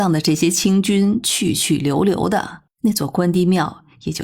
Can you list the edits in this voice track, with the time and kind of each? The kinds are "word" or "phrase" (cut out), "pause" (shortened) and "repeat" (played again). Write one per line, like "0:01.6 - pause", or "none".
0:02.7 - pause